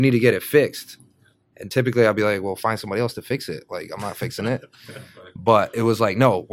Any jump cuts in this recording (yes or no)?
no